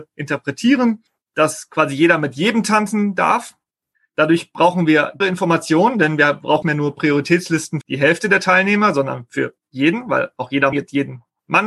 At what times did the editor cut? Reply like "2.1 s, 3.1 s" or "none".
5.2 s, 6.6 s, 7.8 s, 10.7 s

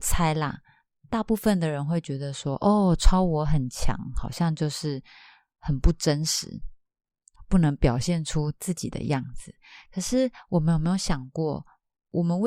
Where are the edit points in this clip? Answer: none

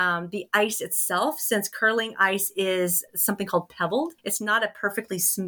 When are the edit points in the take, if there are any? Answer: 3.1 s, 4.2 s

